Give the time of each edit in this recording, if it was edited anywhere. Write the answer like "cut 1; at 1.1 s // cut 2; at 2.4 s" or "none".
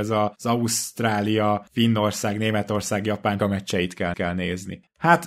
cut 1; at 3.4 s // cut 2; at 4.1 s